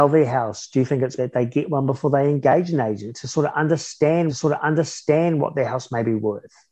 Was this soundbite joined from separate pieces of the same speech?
yes; 2 cuts; at 1.2 s, 4.3 s

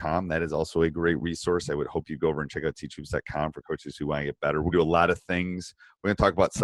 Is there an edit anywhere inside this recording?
yes; 1 cut; at 4.7 s

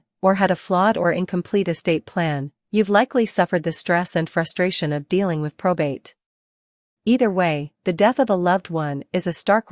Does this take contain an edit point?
no; 0 cuts

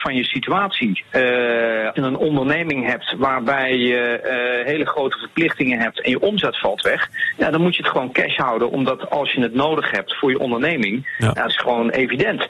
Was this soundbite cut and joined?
yes; 2 cuts; at 2.0 s, 11.5 s

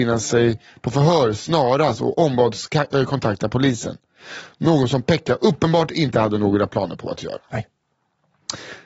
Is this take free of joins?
yes; 0 cuts

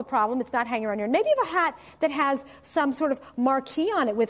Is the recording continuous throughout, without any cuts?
yes; 0 cuts

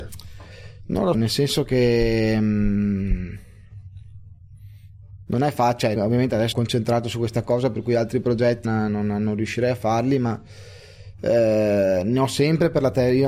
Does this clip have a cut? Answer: yes; 4 cuts; at 1.1 s, 6.0 s, 6.5 s, 8.6 s

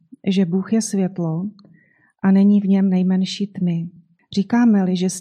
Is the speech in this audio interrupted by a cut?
no; 0 cuts

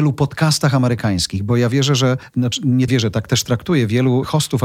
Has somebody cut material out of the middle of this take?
yes; 1 cut; at 2.9 s

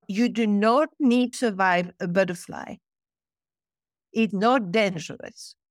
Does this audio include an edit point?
yes; 2 cuts; at 1.3 s, 4.3 s

